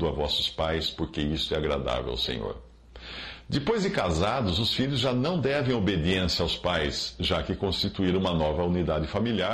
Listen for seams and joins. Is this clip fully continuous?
yes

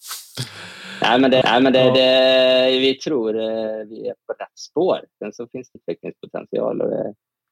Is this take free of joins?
no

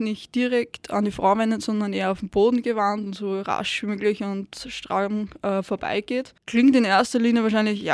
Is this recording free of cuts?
no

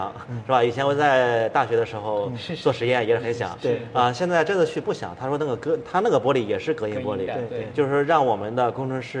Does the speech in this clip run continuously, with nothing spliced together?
yes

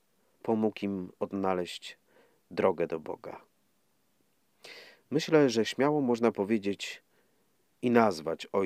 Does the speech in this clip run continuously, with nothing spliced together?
yes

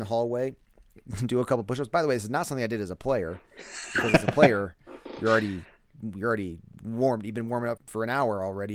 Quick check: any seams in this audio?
yes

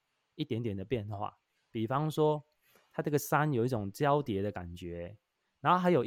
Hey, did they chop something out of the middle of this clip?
no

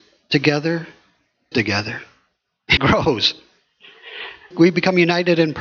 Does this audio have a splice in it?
yes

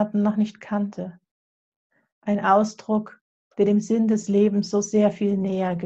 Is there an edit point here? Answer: no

